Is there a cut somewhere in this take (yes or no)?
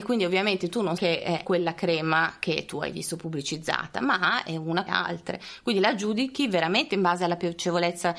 yes